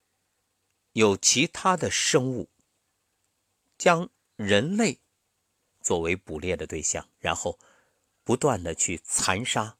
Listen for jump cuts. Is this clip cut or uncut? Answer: cut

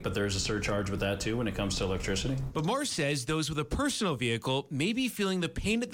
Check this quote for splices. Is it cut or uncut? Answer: uncut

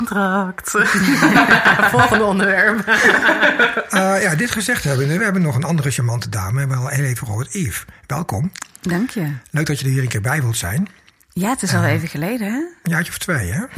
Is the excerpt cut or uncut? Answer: uncut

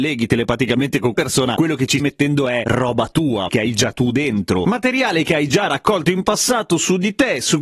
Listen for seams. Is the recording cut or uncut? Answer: cut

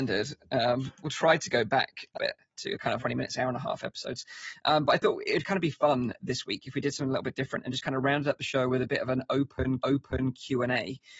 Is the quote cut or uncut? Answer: cut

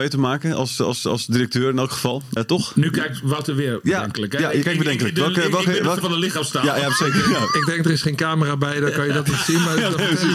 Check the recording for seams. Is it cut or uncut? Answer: cut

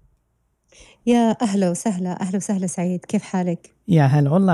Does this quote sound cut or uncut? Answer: uncut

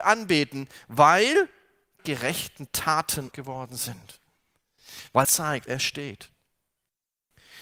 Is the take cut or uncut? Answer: cut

